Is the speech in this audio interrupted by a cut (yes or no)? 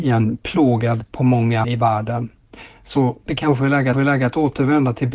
yes